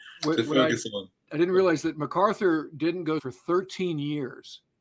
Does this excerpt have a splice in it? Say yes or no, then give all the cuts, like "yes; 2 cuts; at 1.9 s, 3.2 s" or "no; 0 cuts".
yes; 1 cut; at 3.2 s